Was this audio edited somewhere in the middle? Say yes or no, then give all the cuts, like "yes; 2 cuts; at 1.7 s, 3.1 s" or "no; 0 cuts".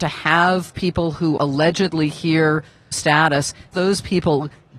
yes; 3 cuts; at 1.4 s, 2.9 s, 3.7 s